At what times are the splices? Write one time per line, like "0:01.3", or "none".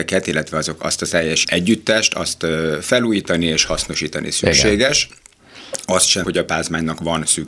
0:01.4
0:06.2

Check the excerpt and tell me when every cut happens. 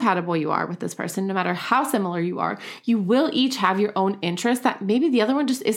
none

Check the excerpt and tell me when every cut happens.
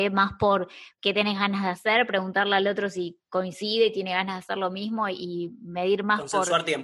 none

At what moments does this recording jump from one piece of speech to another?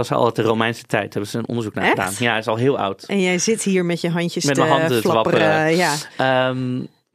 none

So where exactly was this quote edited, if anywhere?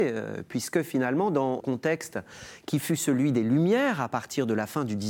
0:01.6

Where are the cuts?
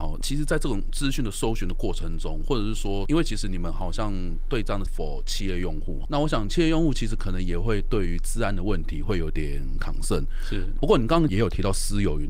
0:04.9
0:06.0

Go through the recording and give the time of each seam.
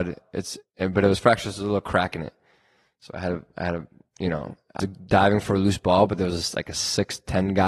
0:04.8

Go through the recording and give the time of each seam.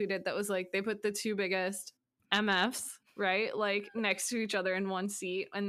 none

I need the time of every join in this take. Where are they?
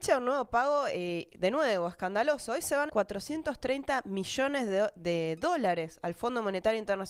0:02.9

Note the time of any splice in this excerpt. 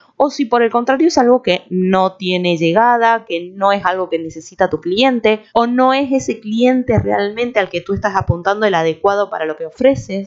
0:05.5

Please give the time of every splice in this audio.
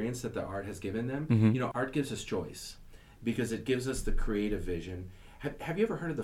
0:01.7

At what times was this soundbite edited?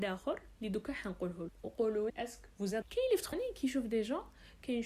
0:01.5
0:02.1
0:02.8
0:03.3

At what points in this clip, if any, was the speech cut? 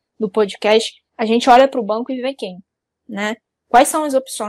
0:01.1
0:02.8

